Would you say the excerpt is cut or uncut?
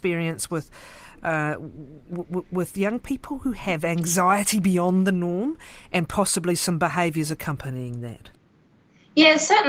uncut